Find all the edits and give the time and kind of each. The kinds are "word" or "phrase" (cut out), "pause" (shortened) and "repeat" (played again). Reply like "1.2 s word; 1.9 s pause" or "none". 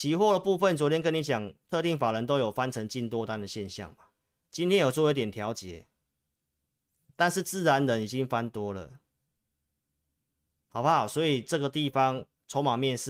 none